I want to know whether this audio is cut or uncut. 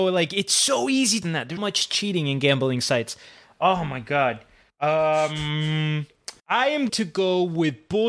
cut